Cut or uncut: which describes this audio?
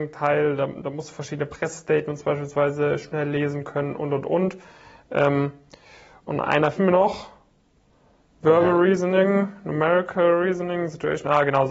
cut